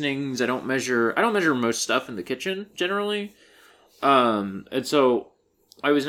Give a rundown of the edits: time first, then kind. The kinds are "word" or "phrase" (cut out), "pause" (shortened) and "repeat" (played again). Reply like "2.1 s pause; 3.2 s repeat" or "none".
none

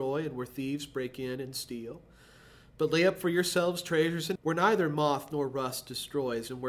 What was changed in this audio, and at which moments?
4.4 s word

